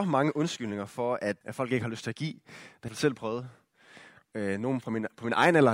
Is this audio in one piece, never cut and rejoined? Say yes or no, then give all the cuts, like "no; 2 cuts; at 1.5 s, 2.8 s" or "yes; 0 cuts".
no; 2 cuts; at 1.4 s, 2.9 s